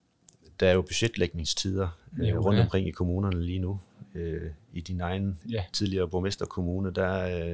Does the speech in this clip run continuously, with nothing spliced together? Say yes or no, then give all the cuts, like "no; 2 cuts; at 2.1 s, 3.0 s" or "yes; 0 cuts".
no; 1 cut; at 5.4 s